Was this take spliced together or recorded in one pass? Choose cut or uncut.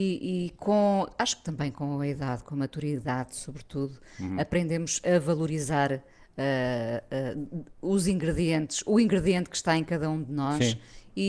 uncut